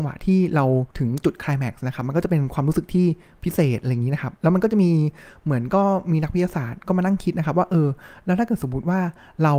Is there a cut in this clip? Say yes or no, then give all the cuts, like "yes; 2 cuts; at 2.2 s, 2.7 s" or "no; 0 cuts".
yes; 2 cuts; at 0.9 s, 4.4 s